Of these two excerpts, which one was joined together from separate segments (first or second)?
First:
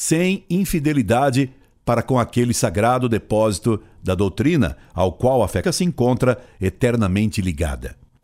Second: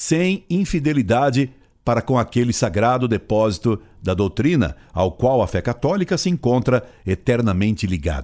first